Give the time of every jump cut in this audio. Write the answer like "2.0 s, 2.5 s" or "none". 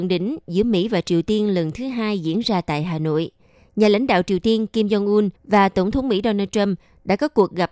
5.4 s